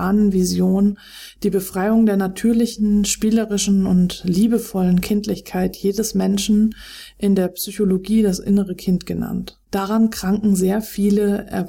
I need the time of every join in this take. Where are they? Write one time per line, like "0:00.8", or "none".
0:09.6